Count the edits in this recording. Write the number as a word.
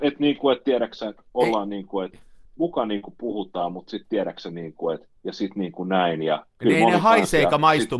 three